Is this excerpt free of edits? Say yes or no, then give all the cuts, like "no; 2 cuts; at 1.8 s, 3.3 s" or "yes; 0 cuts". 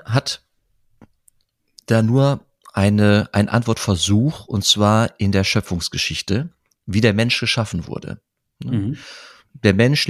yes; 0 cuts